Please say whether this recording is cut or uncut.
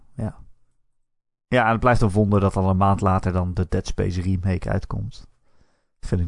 uncut